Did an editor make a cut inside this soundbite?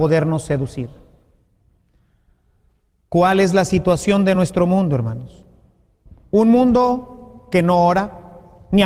no; 0 cuts

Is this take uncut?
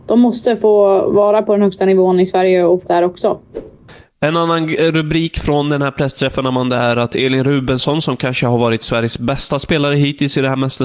no; 2 cuts; at 2.9 s, 4.1 s

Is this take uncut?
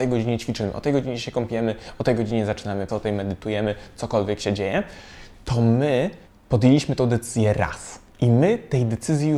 no; 3 cuts; at 2.9 s, 6.2 s, 8.1 s

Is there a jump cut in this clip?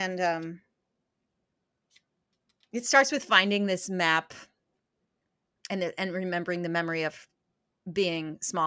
no; 0 cuts

